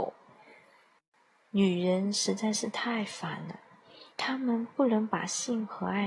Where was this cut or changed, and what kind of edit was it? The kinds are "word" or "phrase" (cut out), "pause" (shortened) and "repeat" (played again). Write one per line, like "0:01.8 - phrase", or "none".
0:04.1 - pause